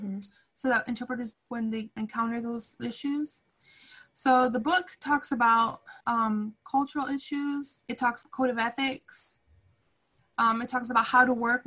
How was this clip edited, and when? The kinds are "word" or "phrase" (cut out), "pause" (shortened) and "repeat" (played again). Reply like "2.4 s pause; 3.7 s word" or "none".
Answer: 1.3 s phrase; 2.0 s word; 2.8 s word; 6.0 s pause; 7.8 s pause; 8.2 s phrase